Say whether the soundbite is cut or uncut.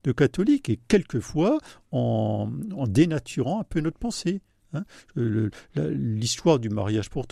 uncut